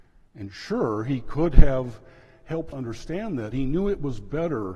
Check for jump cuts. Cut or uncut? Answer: cut